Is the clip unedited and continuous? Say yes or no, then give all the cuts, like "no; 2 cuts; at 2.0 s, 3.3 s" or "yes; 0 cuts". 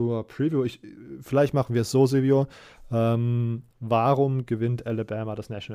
no; 1 cut; at 3.7 s